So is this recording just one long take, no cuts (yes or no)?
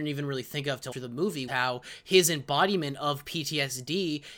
no